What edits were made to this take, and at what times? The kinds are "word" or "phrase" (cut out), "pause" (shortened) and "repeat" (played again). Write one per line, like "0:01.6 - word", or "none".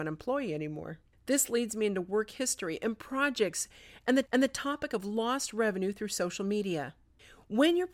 0:01.1 - pause
0:04.3 - repeat